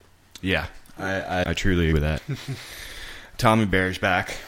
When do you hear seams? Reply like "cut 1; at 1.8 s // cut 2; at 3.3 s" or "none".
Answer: cut 1; at 1.4 s // cut 2; at 1.9 s // cut 3; at 3.4 s